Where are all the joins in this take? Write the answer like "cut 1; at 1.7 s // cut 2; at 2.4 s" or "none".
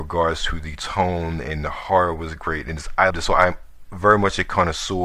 cut 1; at 3.1 s